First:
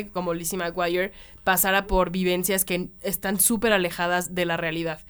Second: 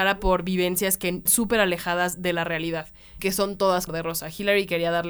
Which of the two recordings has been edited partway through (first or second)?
second